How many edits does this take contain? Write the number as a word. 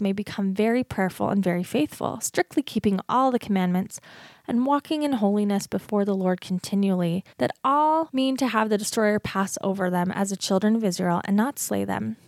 one